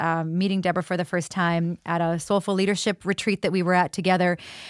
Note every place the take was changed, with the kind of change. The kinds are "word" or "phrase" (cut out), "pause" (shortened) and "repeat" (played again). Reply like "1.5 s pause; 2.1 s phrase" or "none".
none